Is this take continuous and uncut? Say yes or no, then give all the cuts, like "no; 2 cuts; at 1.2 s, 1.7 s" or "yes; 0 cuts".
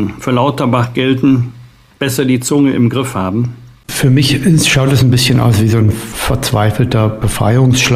yes; 0 cuts